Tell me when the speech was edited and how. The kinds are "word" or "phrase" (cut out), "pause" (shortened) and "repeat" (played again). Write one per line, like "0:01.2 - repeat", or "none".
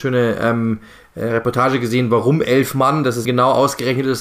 0:03.2 - word